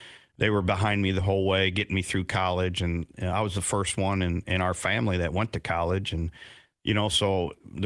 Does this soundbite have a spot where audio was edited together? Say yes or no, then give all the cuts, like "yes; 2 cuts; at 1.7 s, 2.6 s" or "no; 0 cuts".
no; 0 cuts